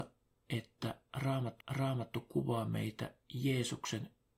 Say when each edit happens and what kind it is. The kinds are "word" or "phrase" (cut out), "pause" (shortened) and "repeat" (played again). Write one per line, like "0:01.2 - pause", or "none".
0:01.6 - repeat
0:03.2 - pause